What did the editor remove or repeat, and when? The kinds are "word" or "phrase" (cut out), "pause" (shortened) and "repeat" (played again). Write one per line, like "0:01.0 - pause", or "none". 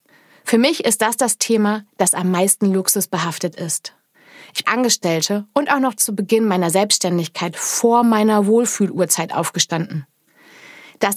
0:04.6 - phrase